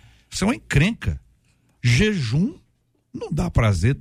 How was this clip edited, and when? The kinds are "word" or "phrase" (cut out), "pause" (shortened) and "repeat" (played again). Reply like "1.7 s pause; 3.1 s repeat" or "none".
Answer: none